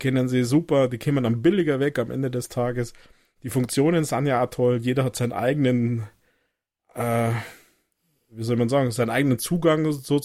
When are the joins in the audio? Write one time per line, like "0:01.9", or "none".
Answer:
none

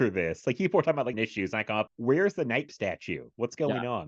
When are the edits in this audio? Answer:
0:01.1
0:01.9
0:02.7

